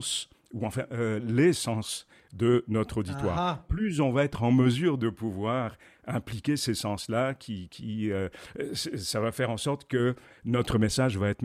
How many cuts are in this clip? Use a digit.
0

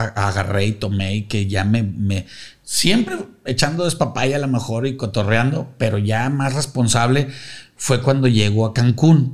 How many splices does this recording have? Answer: 0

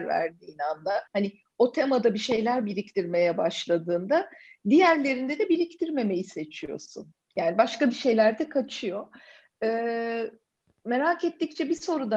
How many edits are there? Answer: 1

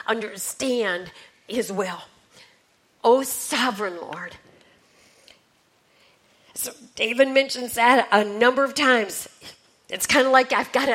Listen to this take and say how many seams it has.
0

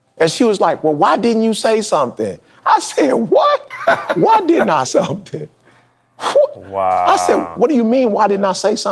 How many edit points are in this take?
1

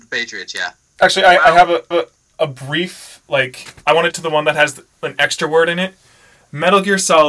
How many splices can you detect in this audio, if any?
2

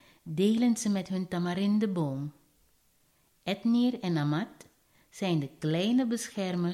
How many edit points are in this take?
0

